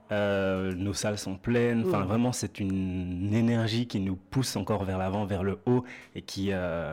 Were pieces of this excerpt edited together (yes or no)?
no